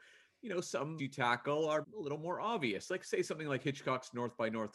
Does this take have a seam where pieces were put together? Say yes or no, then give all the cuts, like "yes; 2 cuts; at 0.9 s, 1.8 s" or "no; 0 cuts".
yes; 2 cuts; at 1.0 s, 1.8 s